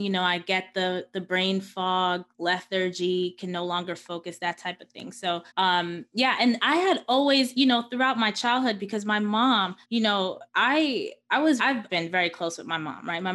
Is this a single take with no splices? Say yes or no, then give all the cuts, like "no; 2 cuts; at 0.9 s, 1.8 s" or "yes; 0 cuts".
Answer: no; 7 cuts; at 2.3 s, 5.5 s, 7.5 s, 9.8 s, 10.5 s, 11.6 s, 11.9 s